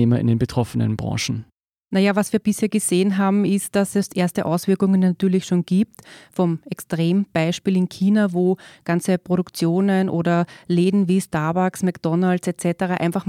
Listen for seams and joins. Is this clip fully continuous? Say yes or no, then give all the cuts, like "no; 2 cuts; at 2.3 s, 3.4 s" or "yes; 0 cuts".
yes; 0 cuts